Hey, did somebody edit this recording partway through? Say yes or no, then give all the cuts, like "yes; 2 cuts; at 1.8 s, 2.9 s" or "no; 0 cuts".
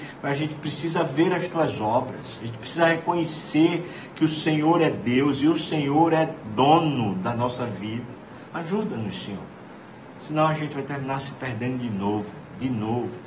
no; 0 cuts